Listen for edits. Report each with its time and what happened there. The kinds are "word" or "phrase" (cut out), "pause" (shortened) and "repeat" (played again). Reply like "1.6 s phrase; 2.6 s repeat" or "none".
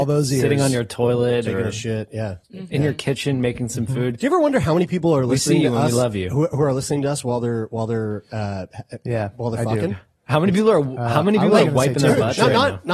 2.4 s pause